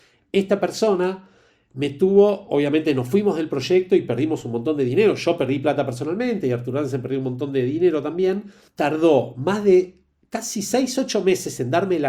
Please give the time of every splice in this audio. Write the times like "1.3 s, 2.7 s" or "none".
none